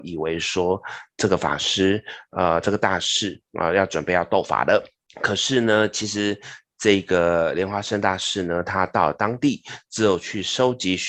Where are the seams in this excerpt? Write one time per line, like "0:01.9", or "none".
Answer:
0:03.5
0:05.0